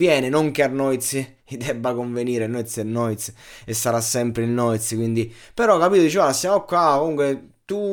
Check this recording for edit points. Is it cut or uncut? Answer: uncut